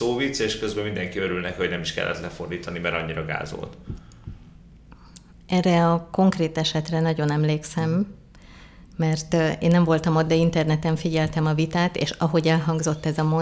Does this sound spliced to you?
no; 0 cuts

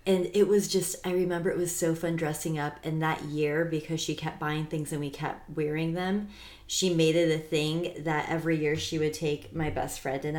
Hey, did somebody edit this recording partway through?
no; 0 cuts

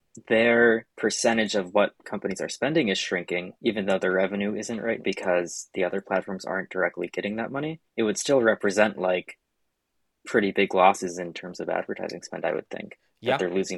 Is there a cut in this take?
yes; 3 cuts; at 3.6 s, 5.0 s, 7.9 s

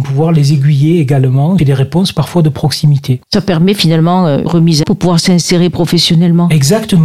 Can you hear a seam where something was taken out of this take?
yes; 4 cuts; at 1.6 s, 3.2 s, 4.5 s, 4.8 s

